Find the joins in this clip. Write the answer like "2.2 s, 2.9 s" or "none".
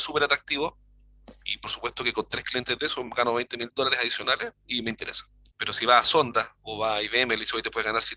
none